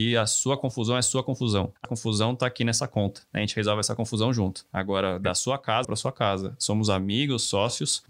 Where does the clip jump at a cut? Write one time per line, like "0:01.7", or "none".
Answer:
0:01.8
0:05.8